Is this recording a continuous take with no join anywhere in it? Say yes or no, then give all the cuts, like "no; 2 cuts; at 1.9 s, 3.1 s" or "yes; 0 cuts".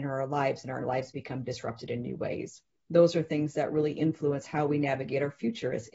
no; 1 cut; at 2.7 s